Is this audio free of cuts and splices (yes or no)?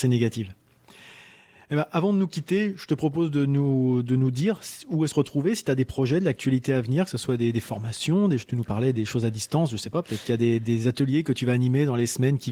no